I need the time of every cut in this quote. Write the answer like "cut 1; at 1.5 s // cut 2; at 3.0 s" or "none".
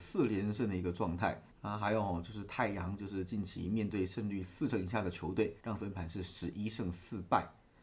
cut 1; at 1.5 s // cut 2; at 5.6 s